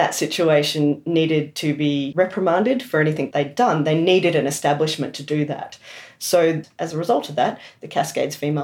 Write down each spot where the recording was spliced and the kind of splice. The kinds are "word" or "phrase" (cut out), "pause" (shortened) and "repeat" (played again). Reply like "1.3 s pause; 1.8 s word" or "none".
3.3 s word